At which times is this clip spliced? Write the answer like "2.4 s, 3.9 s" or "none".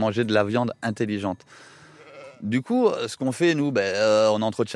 none

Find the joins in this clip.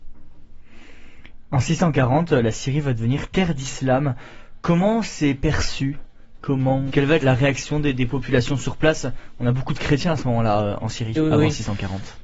6.9 s, 7.2 s, 11.1 s

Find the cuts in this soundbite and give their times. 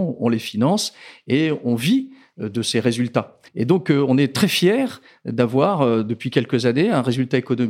3.5 s

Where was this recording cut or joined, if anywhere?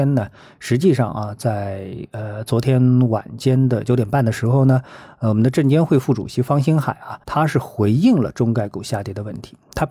7.2 s

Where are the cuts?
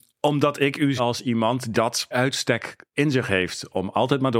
1.0 s, 1.7 s, 2.1 s, 2.9 s

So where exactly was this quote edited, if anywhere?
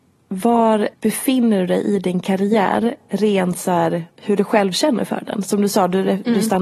0.9 s, 4.1 s

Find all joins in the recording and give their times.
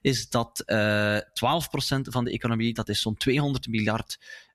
none

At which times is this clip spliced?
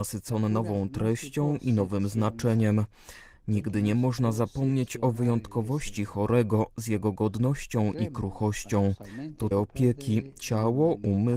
9.5 s

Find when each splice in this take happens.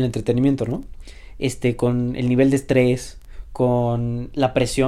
none

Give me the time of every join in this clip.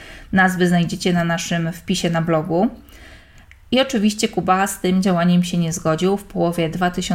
none

